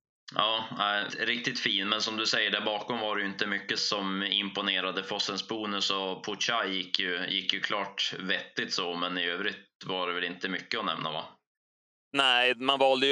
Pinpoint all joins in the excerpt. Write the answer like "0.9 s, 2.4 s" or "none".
1.1 s, 3.8 s